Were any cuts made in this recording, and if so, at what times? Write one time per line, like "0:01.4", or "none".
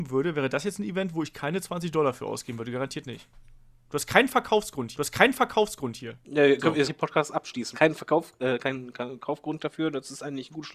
0:04.9
0:06.9
0:07.7